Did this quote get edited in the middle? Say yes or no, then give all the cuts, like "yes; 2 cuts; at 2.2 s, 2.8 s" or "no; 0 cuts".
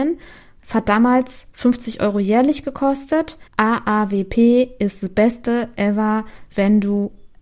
yes; 1 cut; at 3.5 s